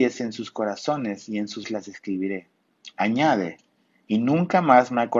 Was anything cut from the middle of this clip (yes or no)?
yes